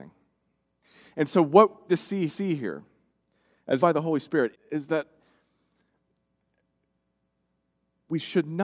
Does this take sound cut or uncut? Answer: cut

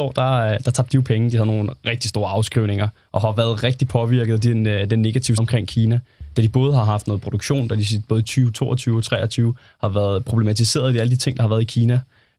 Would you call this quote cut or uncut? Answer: cut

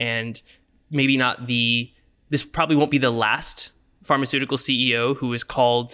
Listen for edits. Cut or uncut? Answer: uncut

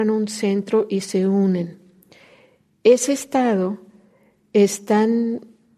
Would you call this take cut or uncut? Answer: uncut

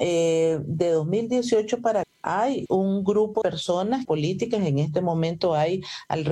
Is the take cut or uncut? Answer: cut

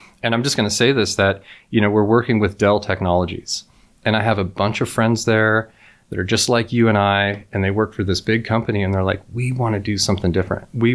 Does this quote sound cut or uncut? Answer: uncut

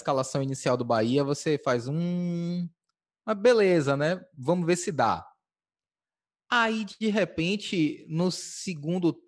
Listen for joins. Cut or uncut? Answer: uncut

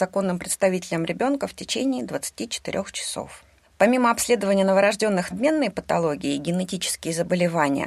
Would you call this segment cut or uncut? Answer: cut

